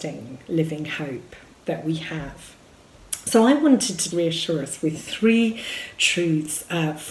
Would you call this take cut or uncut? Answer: cut